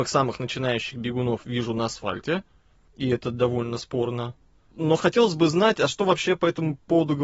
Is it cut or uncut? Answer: uncut